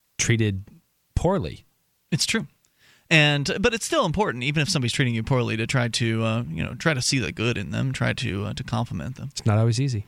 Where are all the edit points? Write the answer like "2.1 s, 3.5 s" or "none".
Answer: none